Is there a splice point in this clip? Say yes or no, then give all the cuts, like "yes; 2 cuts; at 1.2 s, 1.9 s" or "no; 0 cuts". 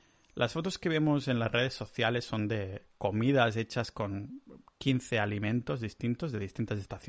no; 0 cuts